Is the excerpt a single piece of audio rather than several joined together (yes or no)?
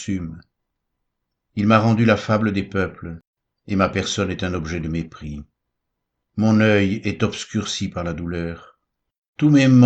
yes